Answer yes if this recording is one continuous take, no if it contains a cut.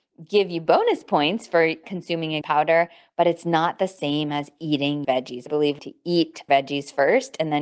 no